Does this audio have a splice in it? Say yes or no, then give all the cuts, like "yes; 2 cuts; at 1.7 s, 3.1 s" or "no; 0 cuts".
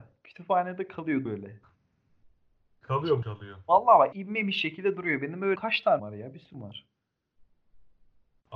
yes; 6 cuts; at 1.3 s, 3.2 s, 4.1 s, 5.6 s, 6.0 s, 6.5 s